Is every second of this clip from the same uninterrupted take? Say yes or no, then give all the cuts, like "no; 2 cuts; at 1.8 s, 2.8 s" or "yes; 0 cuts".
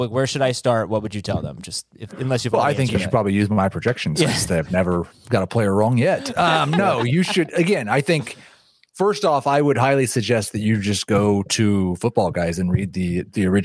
yes; 0 cuts